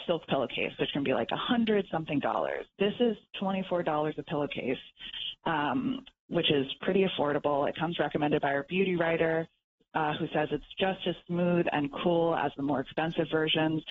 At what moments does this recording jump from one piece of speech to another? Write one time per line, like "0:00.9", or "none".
none